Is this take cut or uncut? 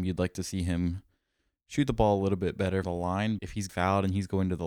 cut